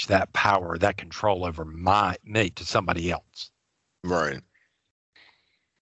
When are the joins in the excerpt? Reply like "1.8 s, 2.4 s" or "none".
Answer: none